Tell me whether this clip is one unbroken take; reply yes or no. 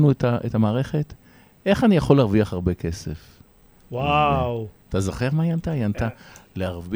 yes